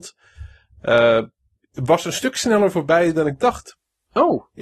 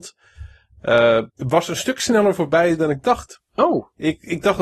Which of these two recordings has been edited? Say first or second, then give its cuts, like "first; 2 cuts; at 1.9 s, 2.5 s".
second; 2 cuts; at 1.3 s, 3.5 s